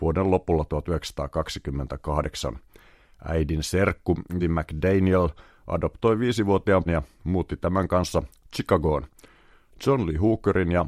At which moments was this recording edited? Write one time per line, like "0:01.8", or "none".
0:04.4
0:06.9